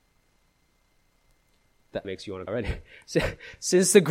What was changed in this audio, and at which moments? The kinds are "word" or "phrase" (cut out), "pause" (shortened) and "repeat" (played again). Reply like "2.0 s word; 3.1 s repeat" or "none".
2.0 s word; 2.5 s word

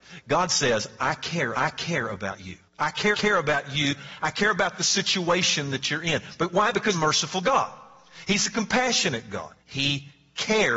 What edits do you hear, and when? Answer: 1.5 s repeat; 2.7 s pause; 3.1 s repeat; 6.9 s word; 9.6 s pause

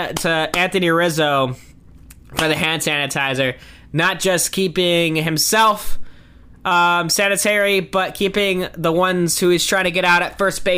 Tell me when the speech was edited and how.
none

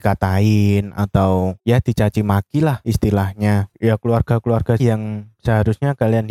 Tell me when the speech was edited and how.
4.8 s phrase

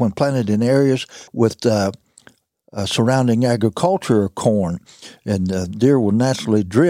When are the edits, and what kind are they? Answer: 1.3 s pause

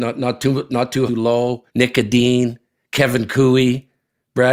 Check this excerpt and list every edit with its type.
1.1 s phrase; 1.7 s pause

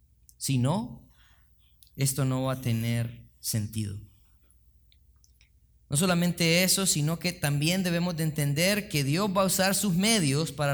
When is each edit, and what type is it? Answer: none

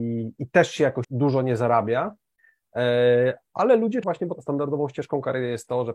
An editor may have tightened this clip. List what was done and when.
1.0 s word; 4.0 s phrase; 4.3 s word

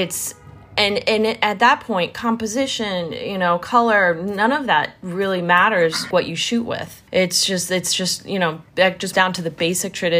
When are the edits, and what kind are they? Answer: 6.1 s word; 7.1 s pause; 8.7 s pause; 9.1 s word

